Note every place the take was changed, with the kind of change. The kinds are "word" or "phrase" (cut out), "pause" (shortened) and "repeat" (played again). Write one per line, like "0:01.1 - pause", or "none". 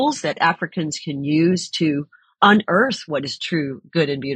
none